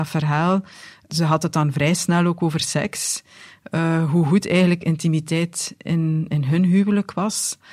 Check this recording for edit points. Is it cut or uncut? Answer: uncut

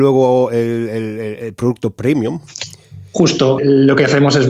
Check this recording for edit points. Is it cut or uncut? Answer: cut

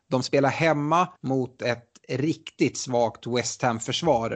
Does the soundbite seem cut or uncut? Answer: cut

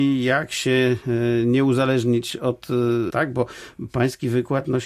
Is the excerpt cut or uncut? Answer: cut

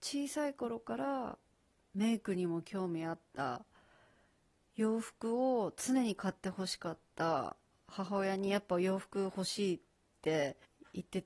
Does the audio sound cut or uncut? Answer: uncut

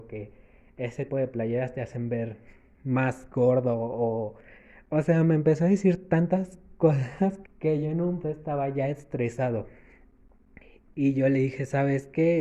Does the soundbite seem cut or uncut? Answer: cut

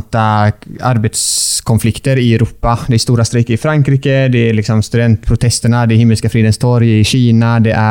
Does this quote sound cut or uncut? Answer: uncut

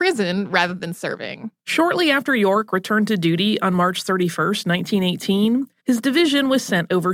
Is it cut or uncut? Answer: cut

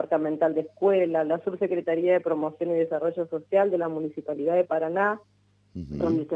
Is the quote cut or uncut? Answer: uncut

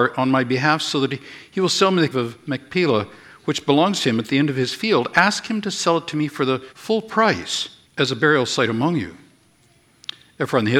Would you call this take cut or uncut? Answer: cut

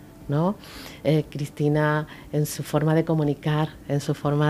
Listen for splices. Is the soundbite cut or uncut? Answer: uncut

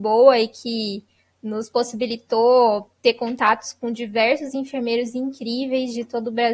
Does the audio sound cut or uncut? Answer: uncut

